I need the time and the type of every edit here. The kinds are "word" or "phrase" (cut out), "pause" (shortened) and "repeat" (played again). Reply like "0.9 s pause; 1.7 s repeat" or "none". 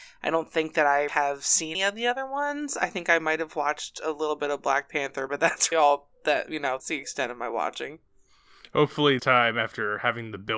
1.1 s word; 1.7 s word; 5.3 s word; 5.7 s word; 6.8 s word; 9.2 s word

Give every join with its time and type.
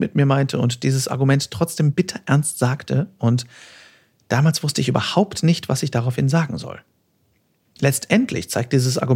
none

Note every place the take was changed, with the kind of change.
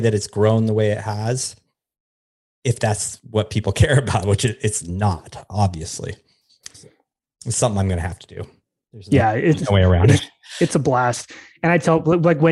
none

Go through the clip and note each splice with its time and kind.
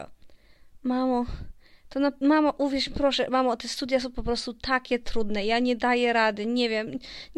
none

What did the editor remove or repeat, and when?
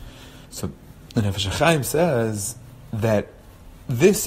none

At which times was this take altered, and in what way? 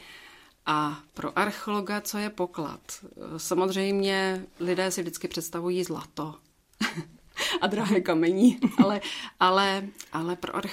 none

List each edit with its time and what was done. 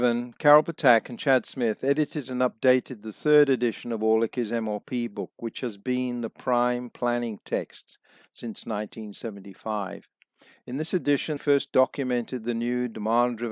11.4 s word

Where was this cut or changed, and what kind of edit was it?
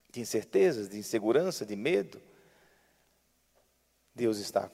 none

